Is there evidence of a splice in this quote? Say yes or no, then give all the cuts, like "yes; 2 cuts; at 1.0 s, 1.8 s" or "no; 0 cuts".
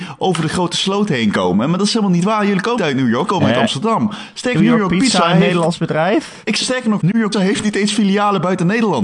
yes; 6 cuts; at 2.8 s, 3.3 s, 4.5 s, 6.6 s, 7.0 s, 7.3 s